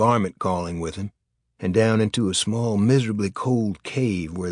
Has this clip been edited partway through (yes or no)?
no